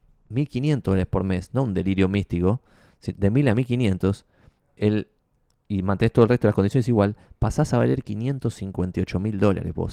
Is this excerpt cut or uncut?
uncut